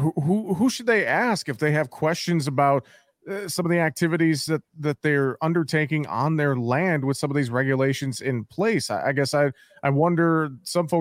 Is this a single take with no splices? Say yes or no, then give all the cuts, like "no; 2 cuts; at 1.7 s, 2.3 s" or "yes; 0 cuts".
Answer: yes; 0 cuts